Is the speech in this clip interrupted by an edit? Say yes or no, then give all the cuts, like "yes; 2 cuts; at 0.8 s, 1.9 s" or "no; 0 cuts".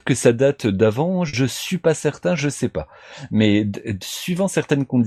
no; 0 cuts